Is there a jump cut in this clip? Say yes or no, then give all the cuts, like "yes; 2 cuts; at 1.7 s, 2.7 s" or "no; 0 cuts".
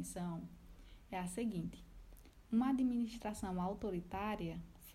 no; 0 cuts